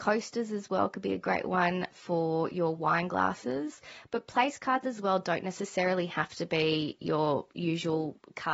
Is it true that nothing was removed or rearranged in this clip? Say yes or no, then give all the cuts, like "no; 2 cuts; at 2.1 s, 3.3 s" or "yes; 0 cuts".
yes; 0 cuts